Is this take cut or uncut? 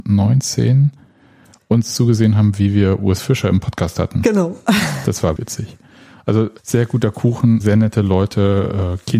cut